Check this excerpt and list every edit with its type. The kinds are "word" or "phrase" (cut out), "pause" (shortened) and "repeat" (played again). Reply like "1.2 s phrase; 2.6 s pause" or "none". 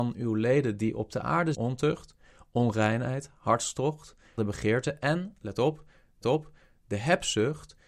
1.5 s word; 4.4 s word; 6.2 s repeat

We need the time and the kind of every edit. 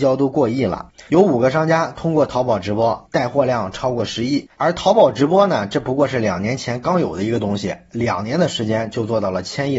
1.1 s pause; 4.5 s pause

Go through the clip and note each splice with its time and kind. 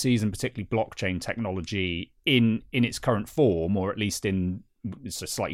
none

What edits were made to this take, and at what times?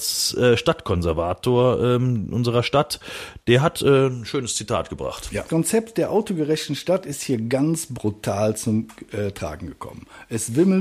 5.5 s word

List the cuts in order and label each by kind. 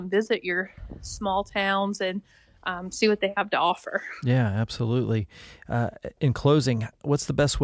none

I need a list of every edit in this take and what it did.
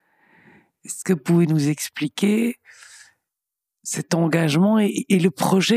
none

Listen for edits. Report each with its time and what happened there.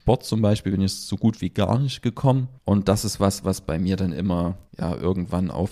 2.6 s pause; 4.7 s pause

